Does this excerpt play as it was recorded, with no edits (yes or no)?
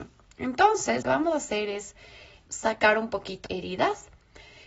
no